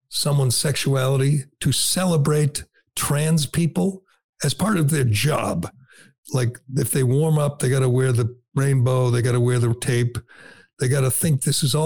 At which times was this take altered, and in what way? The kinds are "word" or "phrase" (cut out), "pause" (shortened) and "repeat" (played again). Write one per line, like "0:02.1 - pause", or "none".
0:09.7 - word